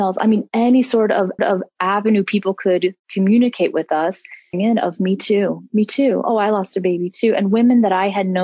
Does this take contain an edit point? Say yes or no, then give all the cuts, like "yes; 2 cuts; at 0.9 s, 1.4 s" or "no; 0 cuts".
yes; 2 cuts; at 1.4 s, 4.5 s